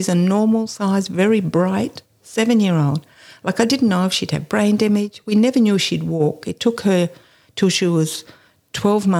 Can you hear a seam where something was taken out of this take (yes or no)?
no